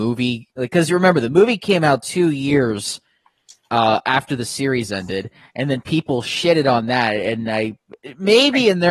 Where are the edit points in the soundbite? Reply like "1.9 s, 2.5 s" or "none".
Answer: none

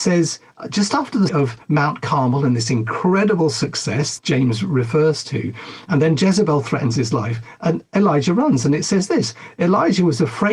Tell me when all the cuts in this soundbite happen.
1.3 s, 4.2 s

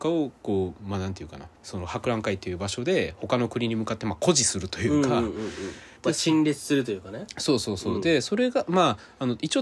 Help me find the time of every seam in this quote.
1.6 s, 6.0 s

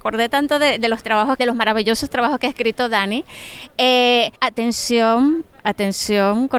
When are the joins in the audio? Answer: 1.4 s, 4.4 s

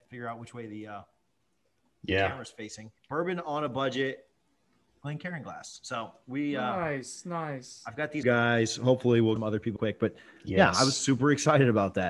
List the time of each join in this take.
3.0 s, 8.2 s, 9.4 s, 9.8 s

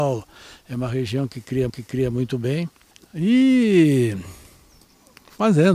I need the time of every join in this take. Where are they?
1.7 s

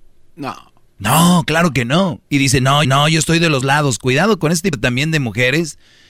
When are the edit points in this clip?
2.3 s, 2.8 s, 3.6 s, 4.7 s

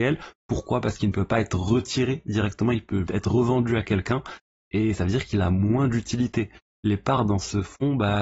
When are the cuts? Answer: 3.1 s

